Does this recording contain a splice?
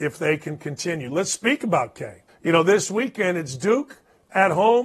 yes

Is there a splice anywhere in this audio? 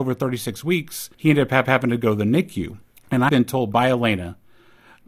yes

